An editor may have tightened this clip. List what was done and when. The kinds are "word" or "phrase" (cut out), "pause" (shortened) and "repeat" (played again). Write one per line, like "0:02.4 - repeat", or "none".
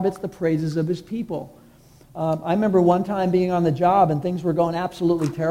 none

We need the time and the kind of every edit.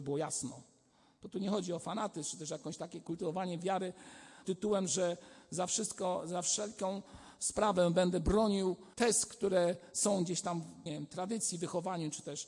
0:04.4 - word
0:08.9 - pause
0:10.9 - phrase

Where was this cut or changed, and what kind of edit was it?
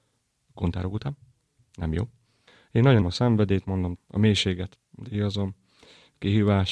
0:03.0 - word
0:04.0 - word
0:04.8 - word

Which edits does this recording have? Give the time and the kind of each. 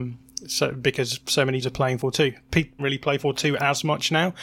0:01.2 - word
0:01.6 - word
0:02.0 - word
0:02.8 - phrase
0:03.2 - word

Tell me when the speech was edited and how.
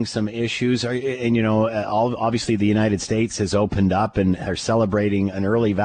none

